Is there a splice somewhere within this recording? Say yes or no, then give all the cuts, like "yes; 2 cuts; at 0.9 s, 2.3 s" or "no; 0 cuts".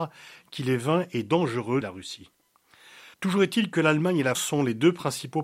yes; 3 cuts; at 1.8 s, 3.1 s, 4.3 s